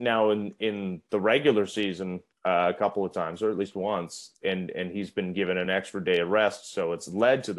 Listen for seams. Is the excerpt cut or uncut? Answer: uncut